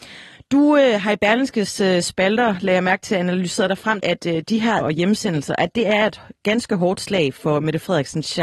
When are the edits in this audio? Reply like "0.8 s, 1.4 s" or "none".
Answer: 4.0 s, 4.8 s